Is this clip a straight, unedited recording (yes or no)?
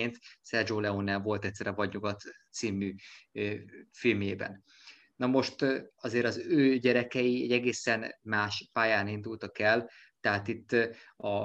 yes